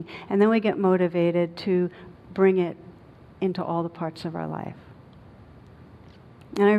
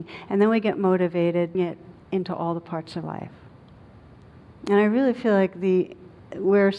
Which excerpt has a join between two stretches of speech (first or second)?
second